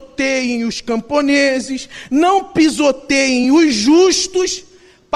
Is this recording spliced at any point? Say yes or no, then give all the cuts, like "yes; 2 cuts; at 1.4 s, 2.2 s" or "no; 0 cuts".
no; 0 cuts